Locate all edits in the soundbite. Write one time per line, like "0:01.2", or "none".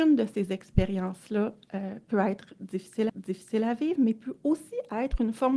0:03.1